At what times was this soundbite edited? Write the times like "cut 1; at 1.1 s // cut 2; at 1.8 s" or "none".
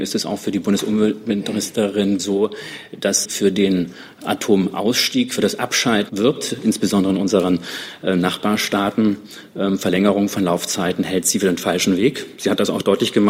cut 1; at 2.2 s // cut 2; at 3.2 s // cut 3; at 6.1 s